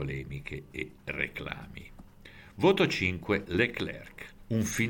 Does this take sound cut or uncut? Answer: cut